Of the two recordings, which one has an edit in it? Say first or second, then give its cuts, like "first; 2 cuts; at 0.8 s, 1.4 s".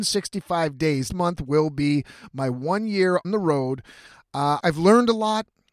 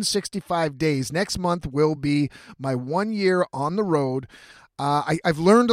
first; 3 cuts; at 1.1 s, 3.2 s, 4.6 s